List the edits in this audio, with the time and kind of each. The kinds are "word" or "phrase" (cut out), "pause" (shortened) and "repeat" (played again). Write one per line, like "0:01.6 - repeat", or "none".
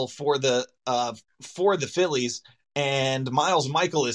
none